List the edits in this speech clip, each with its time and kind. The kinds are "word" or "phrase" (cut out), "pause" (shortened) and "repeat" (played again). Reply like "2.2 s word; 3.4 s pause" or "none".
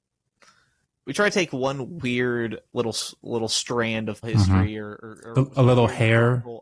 4.2 s word